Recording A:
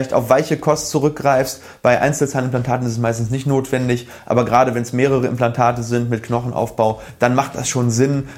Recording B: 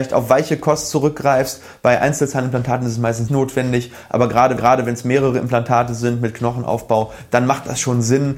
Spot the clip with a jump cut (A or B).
B